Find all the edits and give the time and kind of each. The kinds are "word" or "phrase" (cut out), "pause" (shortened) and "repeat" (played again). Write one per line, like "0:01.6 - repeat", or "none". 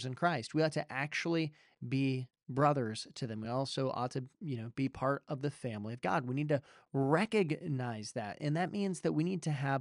none